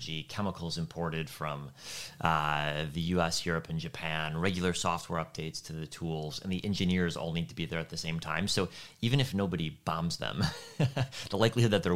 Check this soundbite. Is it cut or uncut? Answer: uncut